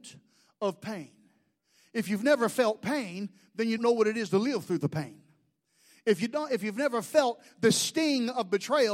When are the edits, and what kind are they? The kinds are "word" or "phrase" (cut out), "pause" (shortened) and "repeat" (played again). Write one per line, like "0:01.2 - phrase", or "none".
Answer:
0:03.8 - word